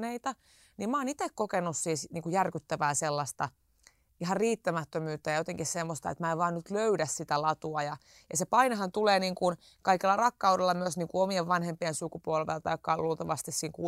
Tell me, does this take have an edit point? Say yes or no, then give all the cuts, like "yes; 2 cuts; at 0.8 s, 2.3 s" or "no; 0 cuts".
no; 0 cuts